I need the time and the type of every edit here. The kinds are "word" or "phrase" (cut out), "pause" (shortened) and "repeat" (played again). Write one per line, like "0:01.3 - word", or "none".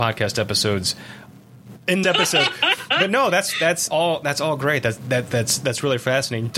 0:02.0 - phrase
0:03.9 - phrase